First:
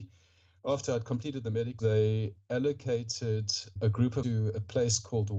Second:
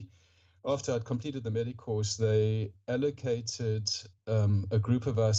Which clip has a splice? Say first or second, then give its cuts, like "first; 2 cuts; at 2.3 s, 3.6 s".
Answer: first; 3 cuts; at 1.8 s, 3.8 s, 4.2 s